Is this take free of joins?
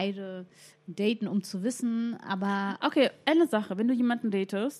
yes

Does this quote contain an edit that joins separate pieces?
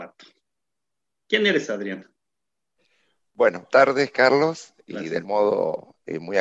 yes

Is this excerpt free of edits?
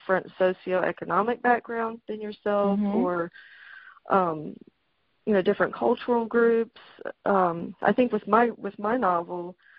yes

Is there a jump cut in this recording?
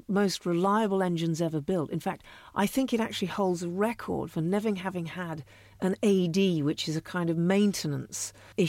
no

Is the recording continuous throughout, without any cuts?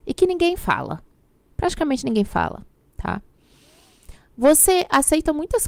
yes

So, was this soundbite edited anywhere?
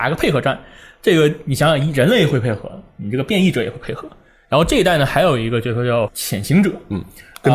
yes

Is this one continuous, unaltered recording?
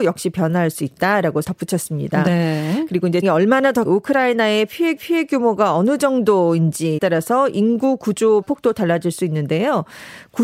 no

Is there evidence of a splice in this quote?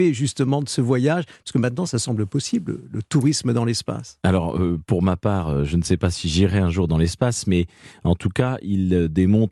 no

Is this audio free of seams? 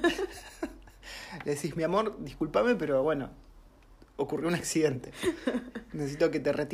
yes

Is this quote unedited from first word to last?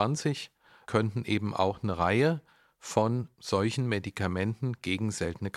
no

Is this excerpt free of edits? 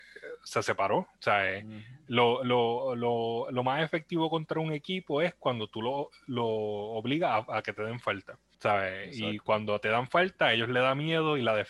no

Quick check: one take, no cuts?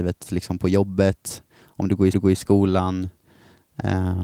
no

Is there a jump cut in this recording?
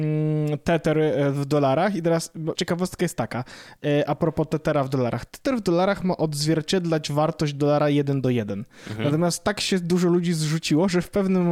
yes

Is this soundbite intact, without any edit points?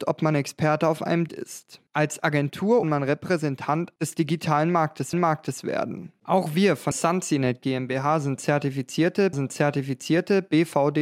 no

